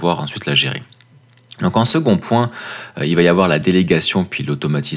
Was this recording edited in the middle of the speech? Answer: no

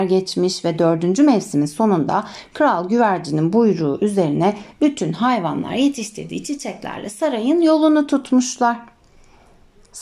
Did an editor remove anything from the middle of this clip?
no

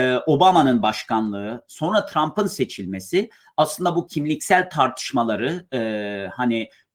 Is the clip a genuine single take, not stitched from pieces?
yes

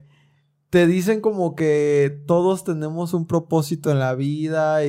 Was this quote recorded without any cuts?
yes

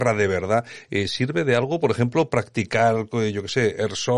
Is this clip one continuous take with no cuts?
yes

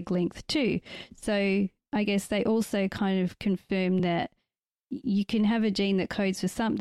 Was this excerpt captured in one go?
yes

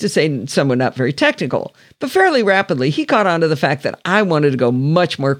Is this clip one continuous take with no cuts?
yes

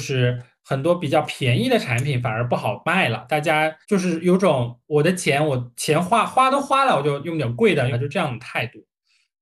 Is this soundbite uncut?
no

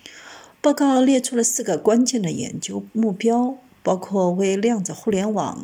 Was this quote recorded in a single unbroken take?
yes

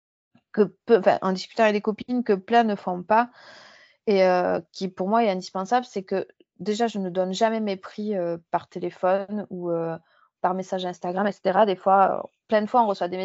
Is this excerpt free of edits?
yes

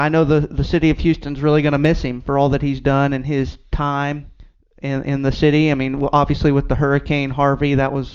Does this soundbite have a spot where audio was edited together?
no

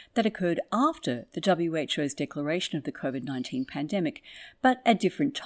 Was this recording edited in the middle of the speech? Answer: no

